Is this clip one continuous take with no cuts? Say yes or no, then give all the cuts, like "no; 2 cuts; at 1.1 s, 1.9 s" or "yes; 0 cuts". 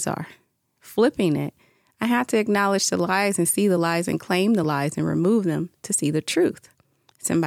yes; 0 cuts